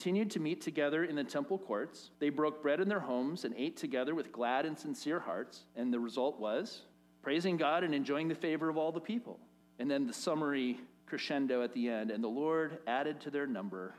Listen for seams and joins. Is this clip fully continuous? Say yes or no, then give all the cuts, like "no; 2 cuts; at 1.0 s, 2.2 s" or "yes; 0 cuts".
no; 5 cuts; at 2.1 s, 5.7 s, 6.9 s, 9.6 s, 11.0 s